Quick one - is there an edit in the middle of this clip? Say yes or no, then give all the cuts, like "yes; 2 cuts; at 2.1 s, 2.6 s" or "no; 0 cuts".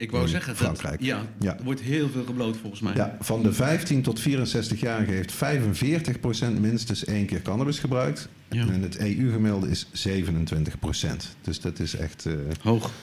no; 0 cuts